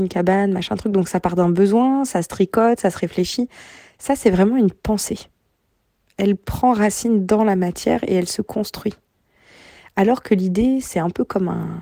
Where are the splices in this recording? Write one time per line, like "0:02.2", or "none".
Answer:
none